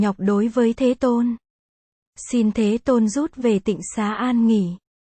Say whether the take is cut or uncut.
uncut